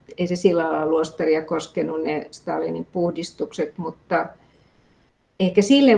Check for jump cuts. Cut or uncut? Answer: uncut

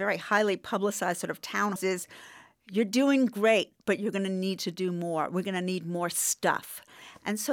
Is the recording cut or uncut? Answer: cut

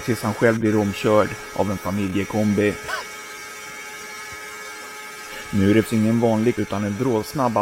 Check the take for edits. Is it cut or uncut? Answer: cut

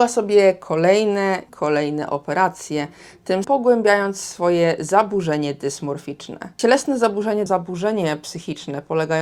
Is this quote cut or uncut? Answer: cut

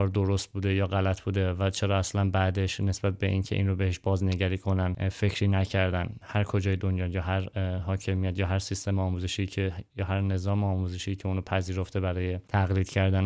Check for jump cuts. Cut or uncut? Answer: uncut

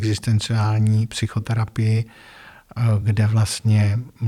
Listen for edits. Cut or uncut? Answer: uncut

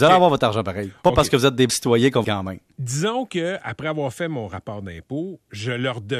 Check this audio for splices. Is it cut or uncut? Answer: cut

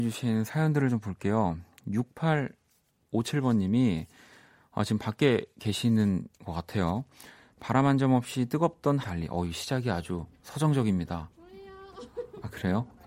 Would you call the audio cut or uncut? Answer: cut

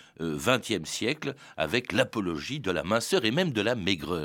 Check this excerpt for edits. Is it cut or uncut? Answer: uncut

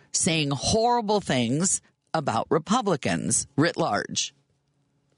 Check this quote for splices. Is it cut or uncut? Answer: uncut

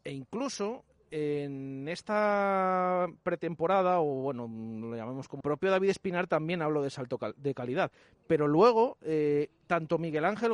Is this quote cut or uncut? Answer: cut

